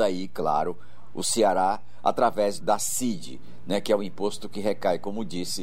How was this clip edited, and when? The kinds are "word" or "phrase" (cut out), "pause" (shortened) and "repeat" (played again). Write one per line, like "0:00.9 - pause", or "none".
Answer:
0:02.6 - word